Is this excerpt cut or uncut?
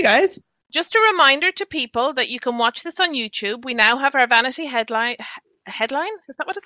uncut